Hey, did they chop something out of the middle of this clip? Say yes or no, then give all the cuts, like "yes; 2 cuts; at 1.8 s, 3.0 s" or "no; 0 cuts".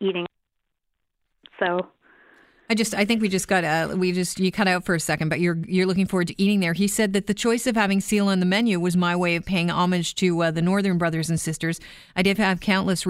no; 0 cuts